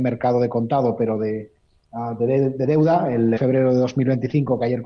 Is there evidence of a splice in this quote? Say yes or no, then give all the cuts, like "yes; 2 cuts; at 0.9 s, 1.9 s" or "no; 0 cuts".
yes; 1 cut; at 3.4 s